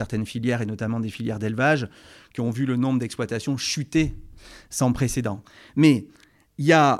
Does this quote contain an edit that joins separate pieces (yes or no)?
no